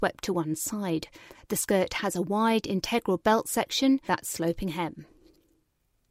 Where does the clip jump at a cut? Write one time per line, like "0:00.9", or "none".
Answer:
0:01.3
0:04.1